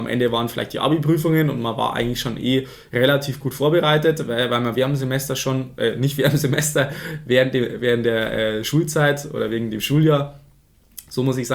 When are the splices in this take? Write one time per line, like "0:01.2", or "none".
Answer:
none